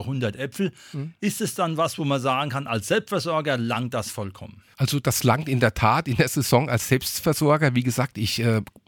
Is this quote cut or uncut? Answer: uncut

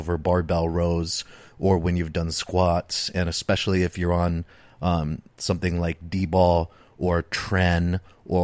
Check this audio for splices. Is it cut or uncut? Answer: uncut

